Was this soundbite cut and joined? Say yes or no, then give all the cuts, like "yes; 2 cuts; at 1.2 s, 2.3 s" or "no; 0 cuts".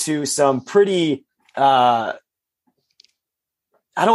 yes; 1 cut; at 1.4 s